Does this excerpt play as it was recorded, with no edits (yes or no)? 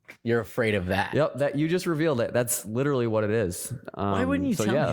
yes